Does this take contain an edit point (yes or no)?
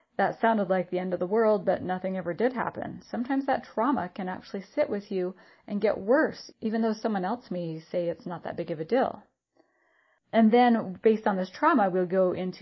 no